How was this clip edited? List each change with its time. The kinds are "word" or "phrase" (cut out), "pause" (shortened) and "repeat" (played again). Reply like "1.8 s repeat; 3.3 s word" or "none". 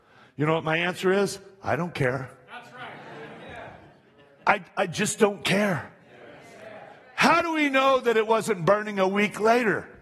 none

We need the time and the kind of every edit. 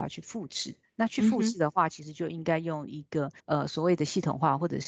3.4 s pause

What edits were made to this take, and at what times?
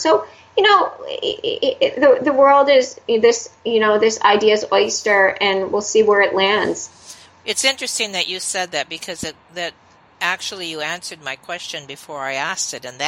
none

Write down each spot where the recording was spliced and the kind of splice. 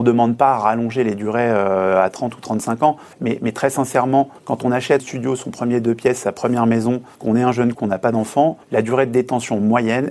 3.1 s pause; 4.4 s pause; 5.0 s phrase; 7.1 s pause; 7.7 s word; 8.6 s pause

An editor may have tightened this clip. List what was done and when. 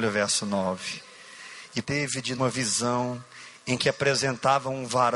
1.8 s word; 2.4 s word; 3.8 s word

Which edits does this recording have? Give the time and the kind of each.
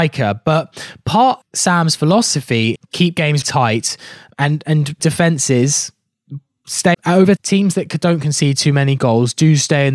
1.4 s word; 2.7 s word; 3.4 s word; 4.3 s word; 5.0 s word; 6.9 s word; 7.4 s word

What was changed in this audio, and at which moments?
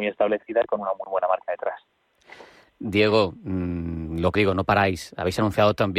4.3 s word

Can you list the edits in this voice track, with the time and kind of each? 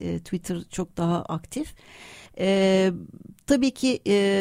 2.3 s pause

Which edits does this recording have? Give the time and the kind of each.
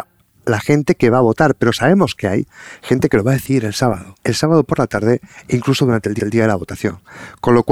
4.2 s pause; 6.2 s repeat

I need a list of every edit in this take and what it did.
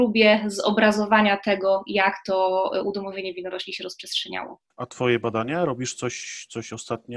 4.7 s pause

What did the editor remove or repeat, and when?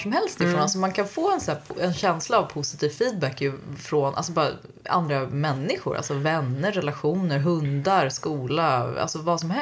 none

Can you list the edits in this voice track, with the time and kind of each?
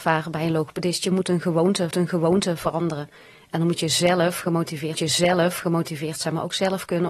1.9 s repeat; 4.9 s repeat

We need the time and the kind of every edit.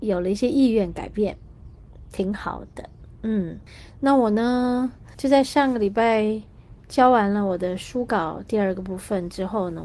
5.1 s pause

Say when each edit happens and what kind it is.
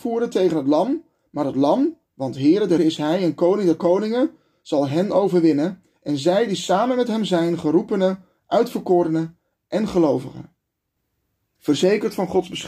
2.0 s pause; 2.8 s word; 11.0 s pause

